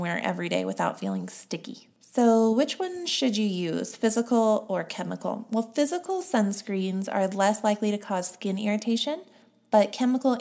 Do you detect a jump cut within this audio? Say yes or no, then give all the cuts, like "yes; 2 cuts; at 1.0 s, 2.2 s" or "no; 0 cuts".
no; 0 cuts